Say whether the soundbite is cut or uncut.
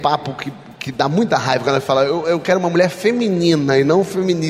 uncut